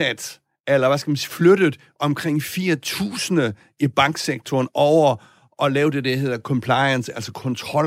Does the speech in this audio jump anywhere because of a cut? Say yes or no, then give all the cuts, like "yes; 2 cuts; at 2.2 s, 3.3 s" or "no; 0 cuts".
no; 0 cuts